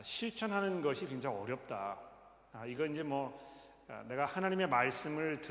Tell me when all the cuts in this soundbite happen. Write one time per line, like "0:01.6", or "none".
none